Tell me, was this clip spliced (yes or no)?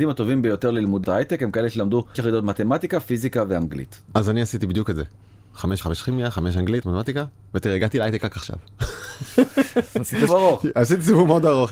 yes